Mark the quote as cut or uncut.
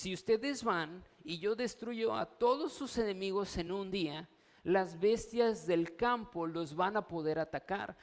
uncut